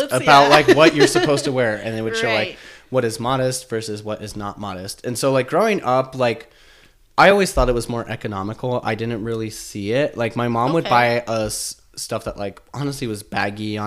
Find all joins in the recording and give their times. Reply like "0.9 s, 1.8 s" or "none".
none